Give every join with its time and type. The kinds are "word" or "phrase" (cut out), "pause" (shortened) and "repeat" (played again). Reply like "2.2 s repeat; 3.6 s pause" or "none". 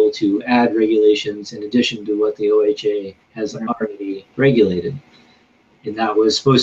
3.2 s pause; 4.3 s pause